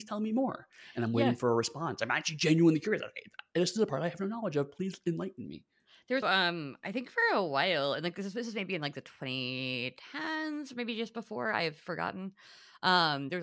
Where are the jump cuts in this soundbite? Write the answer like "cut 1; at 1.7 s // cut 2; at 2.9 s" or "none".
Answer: cut 1; at 6.2 s

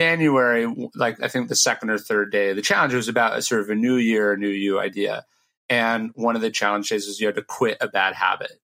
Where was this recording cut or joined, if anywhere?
none

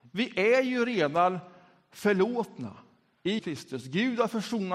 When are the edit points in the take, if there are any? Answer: cut 1; at 3.4 s

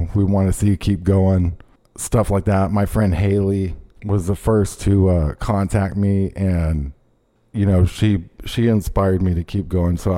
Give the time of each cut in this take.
cut 1; at 1.8 s // cut 2; at 3.9 s // cut 3; at 7.4 s

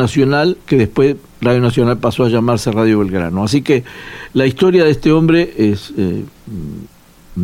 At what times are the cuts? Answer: none

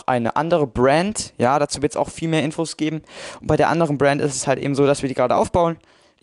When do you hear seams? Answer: none

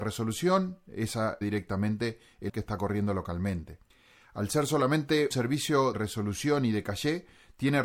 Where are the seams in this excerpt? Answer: cut 1; at 1.4 s // cut 2; at 2.5 s // cut 3; at 3.9 s // cut 4; at 5.3 s // cut 5; at 5.9 s

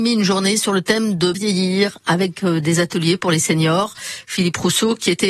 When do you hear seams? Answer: cut 1; at 1.3 s

